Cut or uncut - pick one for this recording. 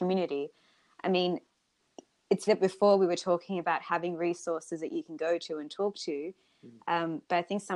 cut